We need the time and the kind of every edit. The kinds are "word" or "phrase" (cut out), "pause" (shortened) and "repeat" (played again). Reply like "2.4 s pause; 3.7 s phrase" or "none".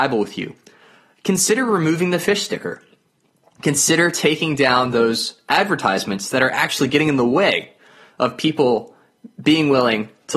none